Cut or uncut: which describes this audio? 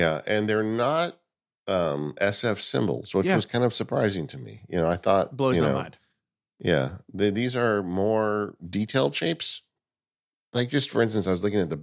uncut